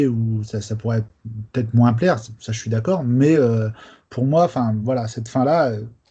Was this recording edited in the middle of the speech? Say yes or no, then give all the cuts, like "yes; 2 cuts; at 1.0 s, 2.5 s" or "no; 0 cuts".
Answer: no; 0 cuts